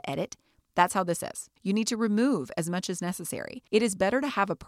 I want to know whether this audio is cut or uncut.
cut